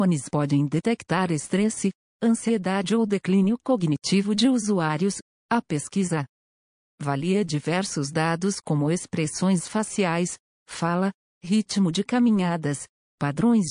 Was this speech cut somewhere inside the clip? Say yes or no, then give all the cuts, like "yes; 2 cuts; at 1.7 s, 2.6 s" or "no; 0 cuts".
no; 0 cuts